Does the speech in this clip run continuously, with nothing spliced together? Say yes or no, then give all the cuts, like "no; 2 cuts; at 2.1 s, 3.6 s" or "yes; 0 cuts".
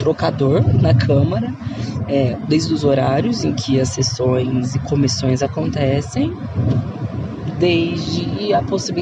yes; 0 cuts